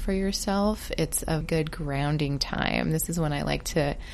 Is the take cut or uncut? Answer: cut